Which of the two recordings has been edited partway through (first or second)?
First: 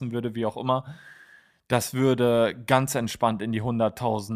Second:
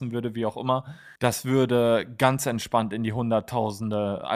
second